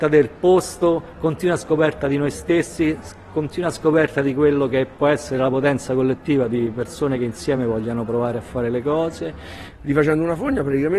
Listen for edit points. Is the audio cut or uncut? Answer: uncut